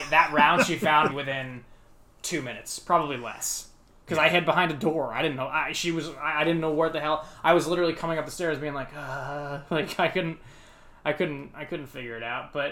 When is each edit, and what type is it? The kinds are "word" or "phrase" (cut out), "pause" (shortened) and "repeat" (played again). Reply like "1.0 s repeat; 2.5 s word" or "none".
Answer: 1.1 s word